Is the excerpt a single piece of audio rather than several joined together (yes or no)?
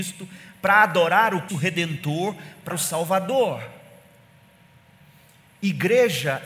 no